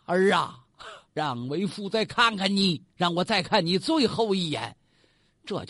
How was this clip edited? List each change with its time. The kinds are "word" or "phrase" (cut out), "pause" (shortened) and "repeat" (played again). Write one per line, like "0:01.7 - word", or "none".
0:01.1 - pause
0:02.9 - pause